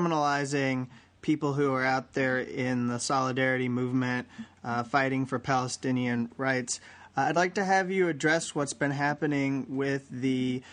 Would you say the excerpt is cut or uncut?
uncut